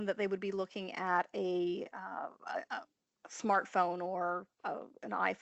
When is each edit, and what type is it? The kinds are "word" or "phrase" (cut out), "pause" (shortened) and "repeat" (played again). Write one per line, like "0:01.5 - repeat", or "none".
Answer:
none